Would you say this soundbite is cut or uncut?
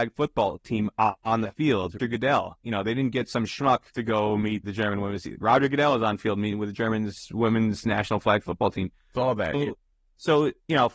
cut